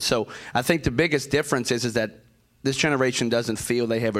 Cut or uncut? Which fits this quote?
uncut